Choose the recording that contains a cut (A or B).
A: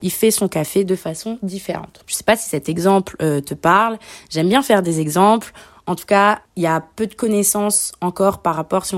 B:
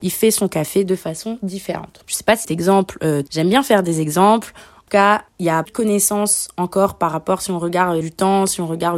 B